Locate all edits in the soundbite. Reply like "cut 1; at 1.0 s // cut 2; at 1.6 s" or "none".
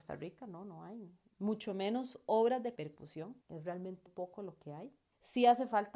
cut 1; at 2.8 s // cut 2; at 3.4 s // cut 3; at 4.1 s